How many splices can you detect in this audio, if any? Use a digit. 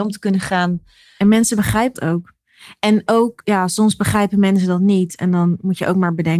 1